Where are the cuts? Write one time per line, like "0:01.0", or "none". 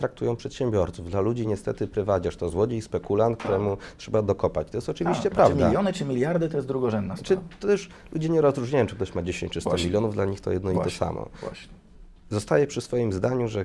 none